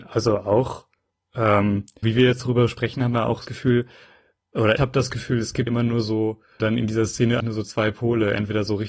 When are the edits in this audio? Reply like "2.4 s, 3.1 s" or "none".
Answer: 2.0 s, 3.4 s, 4.8 s, 5.7 s, 6.6 s, 7.4 s

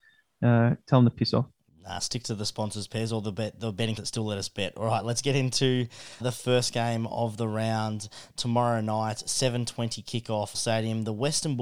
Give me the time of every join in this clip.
4.0 s, 6.2 s, 10.5 s

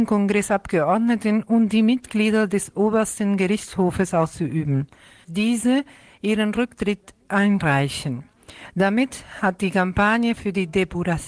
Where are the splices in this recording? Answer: 5.2 s

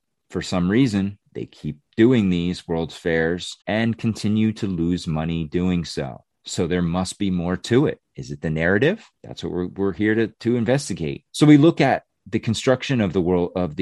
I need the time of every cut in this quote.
1.3 s, 1.9 s, 3.6 s, 6.3 s, 9.2 s, 11.3 s

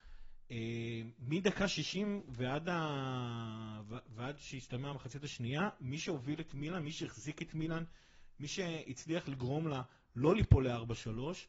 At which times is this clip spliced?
none

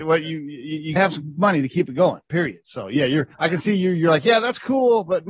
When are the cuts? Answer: 1.0 s, 3.3 s

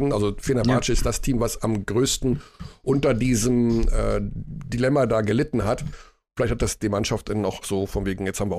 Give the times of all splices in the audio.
7.6 s

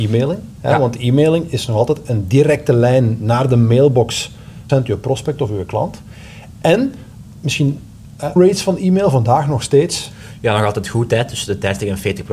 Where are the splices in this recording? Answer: 4.7 s, 7.3 s, 8.4 s

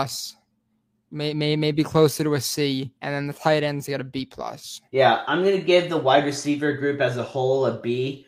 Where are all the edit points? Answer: 3.0 s, 4.9 s

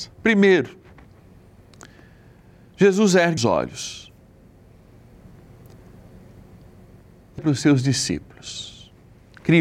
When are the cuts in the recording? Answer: 3.4 s, 7.4 s

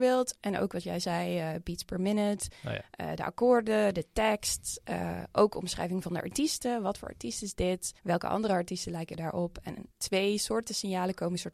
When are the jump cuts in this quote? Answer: 8.0 s, 9.9 s

